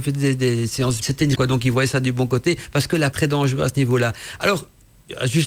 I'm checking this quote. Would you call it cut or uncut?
cut